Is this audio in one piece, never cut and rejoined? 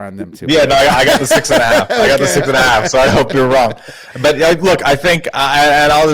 no; 1 cut; at 3.1 s

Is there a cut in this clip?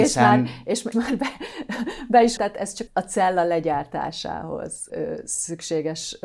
yes; 4 cuts; at 0.9 s, 2.4 s, 2.9 s, 4.9 s

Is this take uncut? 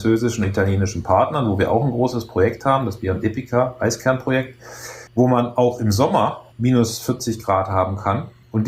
no; 1 cut; at 5.1 s

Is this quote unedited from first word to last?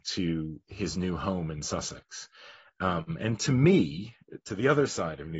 yes; 0 cuts

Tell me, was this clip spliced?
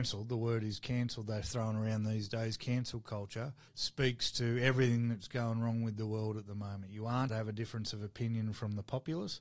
yes; 2 cuts; at 3.7 s, 7.3 s

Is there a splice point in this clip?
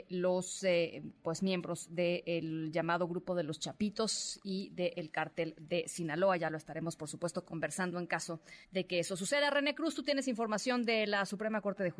yes; 1 cut; at 8.6 s

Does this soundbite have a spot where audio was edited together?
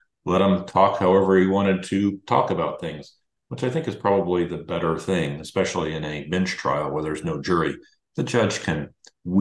no; 0 cuts

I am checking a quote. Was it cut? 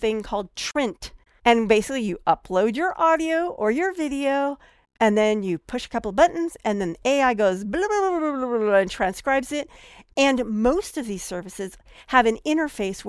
no; 0 cuts

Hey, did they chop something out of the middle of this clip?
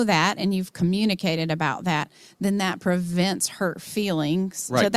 no; 0 cuts

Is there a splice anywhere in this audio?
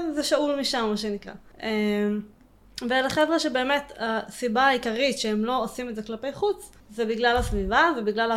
yes; 2 cuts; at 1.5 s, 6.8 s

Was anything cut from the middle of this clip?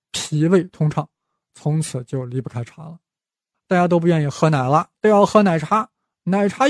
no; 0 cuts

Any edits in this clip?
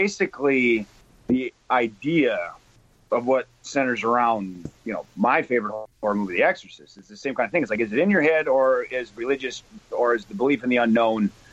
yes; 4 cuts; at 1.0 s, 2.8 s, 4.8 s, 5.9 s

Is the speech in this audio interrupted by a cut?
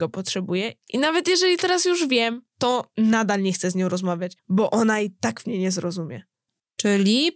no; 0 cuts

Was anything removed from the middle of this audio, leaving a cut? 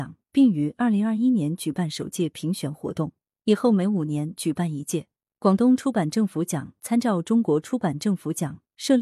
no; 0 cuts

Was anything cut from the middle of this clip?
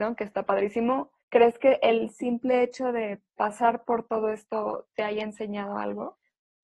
yes; 1 cut; at 1.2 s

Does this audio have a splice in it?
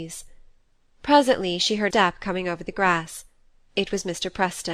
yes; 1 cut; at 1.9 s

